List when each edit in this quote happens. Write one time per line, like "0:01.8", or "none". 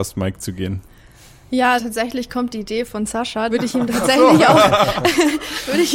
0:01.8
0:03.5